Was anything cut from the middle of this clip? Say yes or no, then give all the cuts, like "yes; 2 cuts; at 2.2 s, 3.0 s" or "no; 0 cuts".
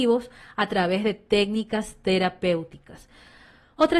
no; 0 cuts